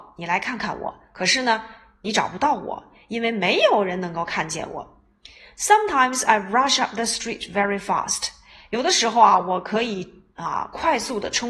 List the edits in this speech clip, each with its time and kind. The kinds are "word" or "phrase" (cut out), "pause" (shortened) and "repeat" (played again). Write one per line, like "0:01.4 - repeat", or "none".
none